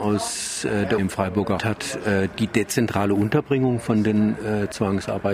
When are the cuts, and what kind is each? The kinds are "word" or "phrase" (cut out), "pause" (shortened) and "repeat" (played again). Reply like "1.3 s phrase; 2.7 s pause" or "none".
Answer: 1.0 s word; 1.6 s phrase